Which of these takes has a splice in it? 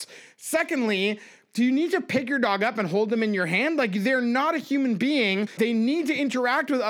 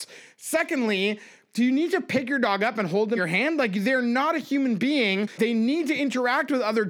second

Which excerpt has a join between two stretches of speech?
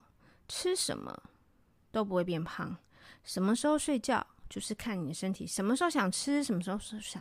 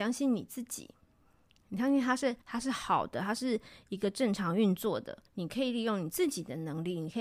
second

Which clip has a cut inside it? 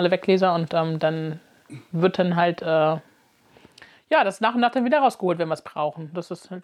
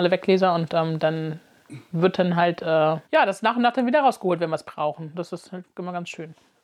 second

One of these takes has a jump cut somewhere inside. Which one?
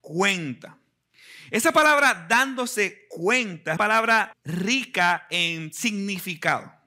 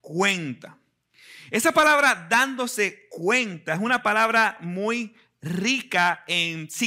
first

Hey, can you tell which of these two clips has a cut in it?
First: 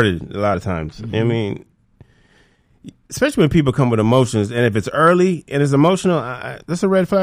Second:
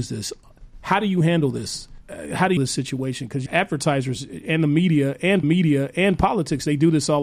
second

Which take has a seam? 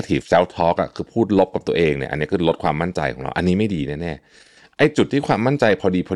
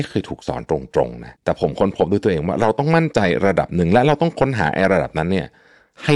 second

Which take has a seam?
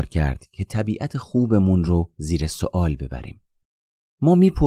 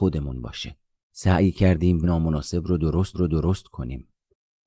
second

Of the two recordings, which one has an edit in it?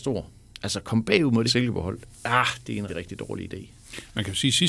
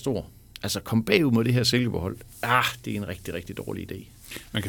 first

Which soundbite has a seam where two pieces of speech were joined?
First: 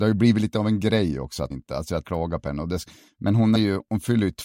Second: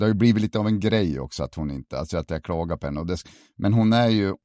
first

